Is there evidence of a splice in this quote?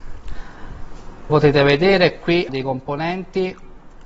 yes; 2 cuts; at 1.3 s, 2.5 s

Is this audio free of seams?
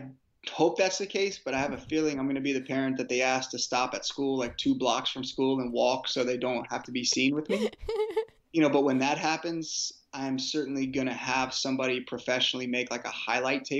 no; 1 cut; at 8.5 s

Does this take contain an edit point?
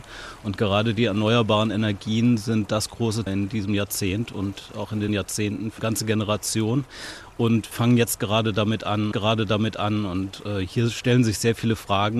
yes; 5 cuts; at 3.3 s, 5.1 s, 5.8 s, 7.7 s, 9.1 s

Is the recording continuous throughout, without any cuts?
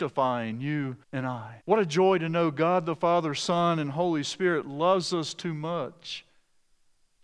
no; 2 cuts; at 1.0 s, 1.6 s

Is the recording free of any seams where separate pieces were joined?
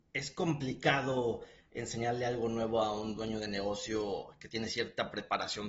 yes; 0 cuts

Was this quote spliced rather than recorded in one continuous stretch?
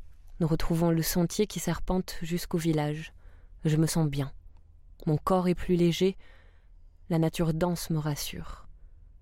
no; 0 cuts

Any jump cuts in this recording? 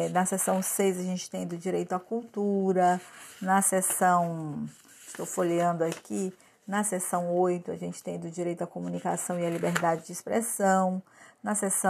no; 0 cuts

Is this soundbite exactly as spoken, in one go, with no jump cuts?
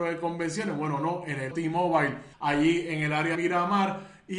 no; 3 cuts; at 1.5 s, 2.3 s, 3.3 s

